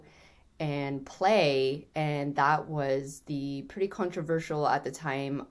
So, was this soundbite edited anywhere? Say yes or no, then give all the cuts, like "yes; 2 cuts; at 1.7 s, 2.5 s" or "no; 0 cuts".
no; 0 cuts